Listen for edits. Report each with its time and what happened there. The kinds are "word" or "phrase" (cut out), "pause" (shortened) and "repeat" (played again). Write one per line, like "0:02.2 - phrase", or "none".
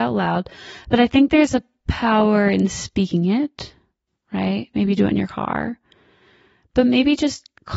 none